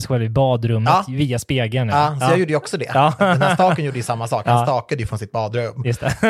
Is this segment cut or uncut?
uncut